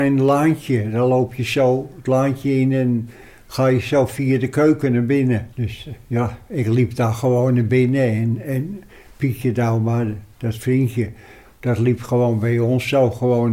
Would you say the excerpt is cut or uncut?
cut